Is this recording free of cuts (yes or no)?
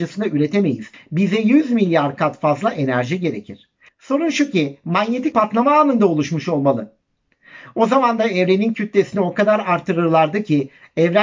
no